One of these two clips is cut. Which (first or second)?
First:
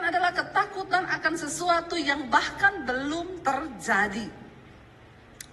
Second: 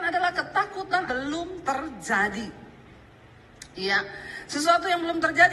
second